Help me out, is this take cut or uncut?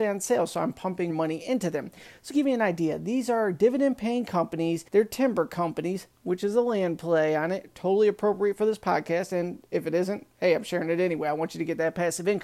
cut